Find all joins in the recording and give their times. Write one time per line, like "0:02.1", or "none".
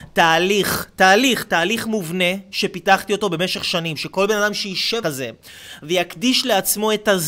0:05.0